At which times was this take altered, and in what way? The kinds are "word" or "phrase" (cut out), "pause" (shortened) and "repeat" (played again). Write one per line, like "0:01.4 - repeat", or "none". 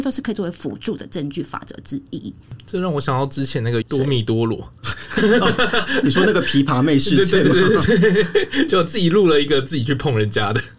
0:03.8 - word